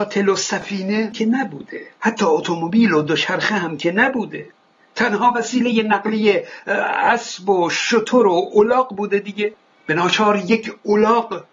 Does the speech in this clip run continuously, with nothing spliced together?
yes; 0 cuts

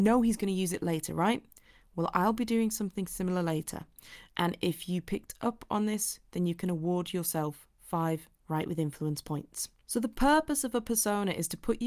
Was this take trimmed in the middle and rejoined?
no; 0 cuts

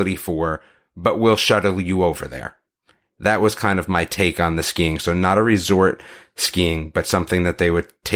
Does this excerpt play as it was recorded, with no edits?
yes; 0 cuts

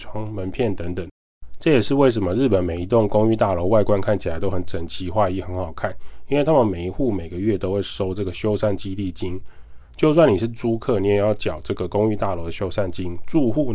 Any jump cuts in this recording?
no; 0 cuts

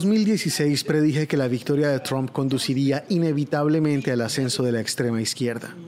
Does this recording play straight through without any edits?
yes; 0 cuts

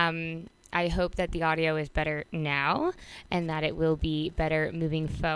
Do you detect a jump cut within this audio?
no; 0 cuts

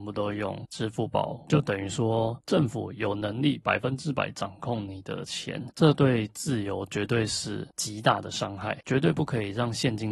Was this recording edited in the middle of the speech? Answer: yes; 1 cut; at 1.4 s

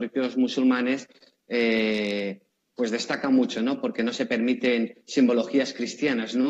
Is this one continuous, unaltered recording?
yes; 0 cuts

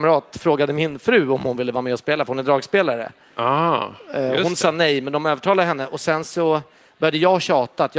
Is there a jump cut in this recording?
no; 0 cuts

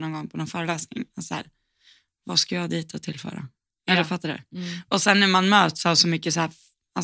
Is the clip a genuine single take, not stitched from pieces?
yes; 0 cuts

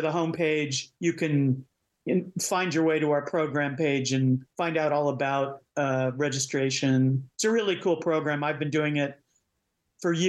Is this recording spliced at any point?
yes; 3 cuts; at 0.9 s, 4.5 s, 7.3 s

